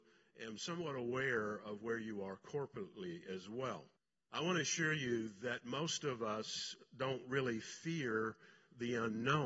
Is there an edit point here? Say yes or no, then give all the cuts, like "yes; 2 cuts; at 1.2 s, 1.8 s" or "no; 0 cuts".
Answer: yes; 1 cut; at 4.0 s